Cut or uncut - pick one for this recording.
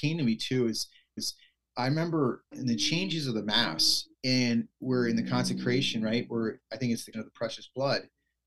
cut